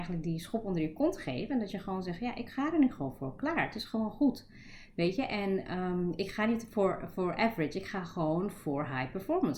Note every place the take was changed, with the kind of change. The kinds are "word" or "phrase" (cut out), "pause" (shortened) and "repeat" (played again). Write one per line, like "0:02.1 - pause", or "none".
none